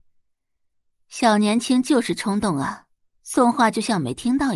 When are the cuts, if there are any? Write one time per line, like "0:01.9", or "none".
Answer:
0:03.0